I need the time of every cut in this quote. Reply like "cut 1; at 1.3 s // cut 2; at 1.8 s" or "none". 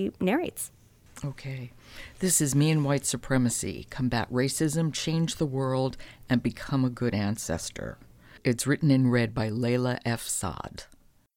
none

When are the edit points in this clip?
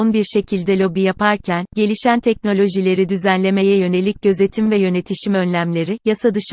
none

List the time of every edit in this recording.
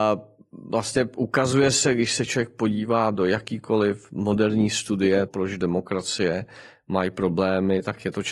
cut 1; at 5.3 s

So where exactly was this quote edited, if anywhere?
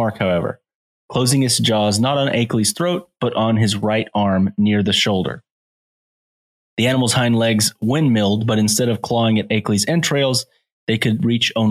none

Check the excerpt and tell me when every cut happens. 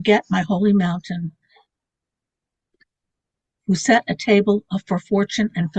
none

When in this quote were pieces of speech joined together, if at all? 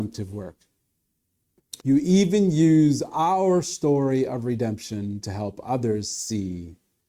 cut 1; at 1.8 s

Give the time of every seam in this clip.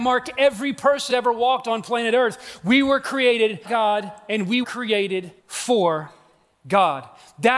cut 1; at 1.1 s // cut 2; at 3.6 s // cut 3; at 4.6 s // cut 4; at 5.4 s

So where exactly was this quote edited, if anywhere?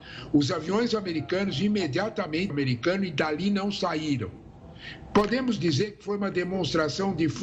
cut 1; at 2.5 s

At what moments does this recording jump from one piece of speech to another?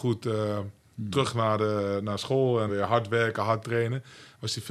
cut 1; at 2.7 s

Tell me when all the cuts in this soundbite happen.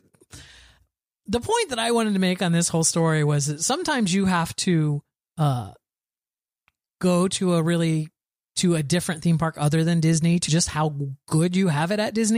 cut 1; at 10.5 s

